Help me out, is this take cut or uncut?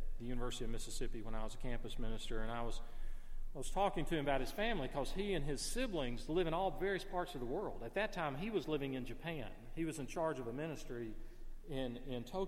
uncut